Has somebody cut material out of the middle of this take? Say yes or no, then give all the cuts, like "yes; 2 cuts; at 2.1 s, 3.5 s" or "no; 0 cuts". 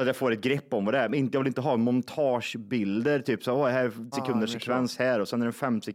yes; 1 cut; at 4.1 s